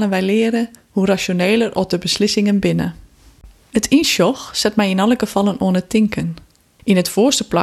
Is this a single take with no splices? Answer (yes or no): yes